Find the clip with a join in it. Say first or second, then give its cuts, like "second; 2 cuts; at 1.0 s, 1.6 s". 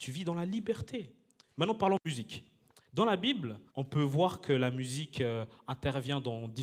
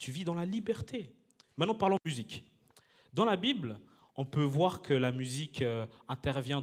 first; 2 cuts; at 2.9 s, 3.7 s